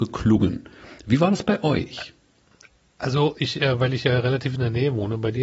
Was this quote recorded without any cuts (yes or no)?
yes